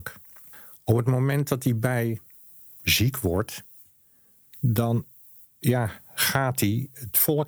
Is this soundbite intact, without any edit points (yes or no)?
yes